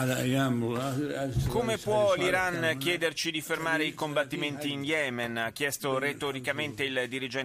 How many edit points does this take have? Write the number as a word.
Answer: zero